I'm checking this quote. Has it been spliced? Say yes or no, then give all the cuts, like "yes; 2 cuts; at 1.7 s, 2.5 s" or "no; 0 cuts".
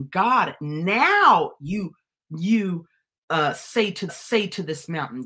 yes; 1 cut; at 4.1 s